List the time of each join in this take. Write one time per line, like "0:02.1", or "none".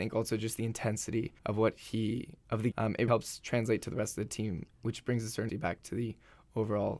0:01.4
0:02.4
0:02.7
0:03.1
0:05.5